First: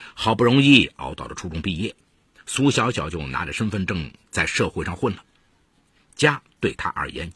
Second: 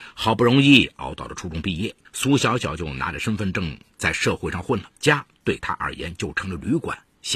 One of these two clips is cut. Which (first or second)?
second